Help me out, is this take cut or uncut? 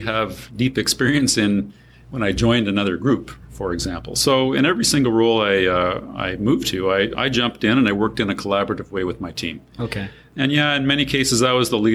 uncut